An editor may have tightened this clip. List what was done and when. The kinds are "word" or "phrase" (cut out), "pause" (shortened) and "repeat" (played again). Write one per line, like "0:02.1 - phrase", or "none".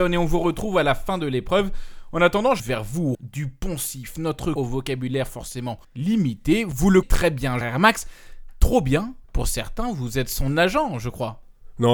0:02.6 - phrase
0:03.1 - word
0:04.6 - phrase
0:05.8 - pause
0:07.0 - word
0:07.6 - word
0:09.2 - pause